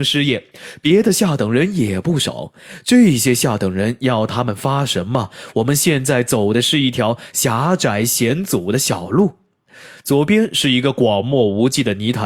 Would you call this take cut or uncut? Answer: uncut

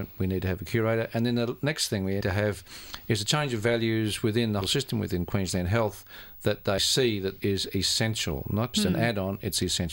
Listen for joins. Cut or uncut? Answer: cut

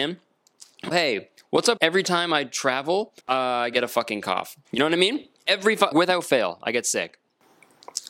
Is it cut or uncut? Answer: cut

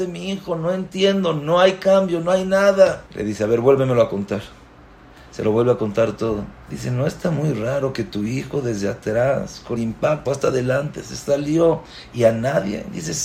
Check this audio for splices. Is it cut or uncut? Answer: cut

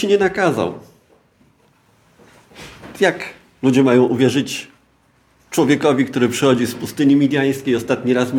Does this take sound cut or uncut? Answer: uncut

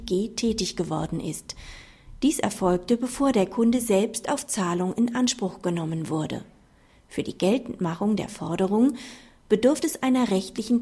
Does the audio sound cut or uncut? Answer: uncut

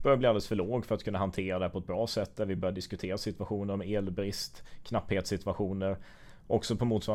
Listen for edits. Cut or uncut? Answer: uncut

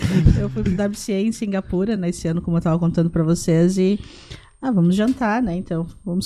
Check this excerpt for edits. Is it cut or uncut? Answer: uncut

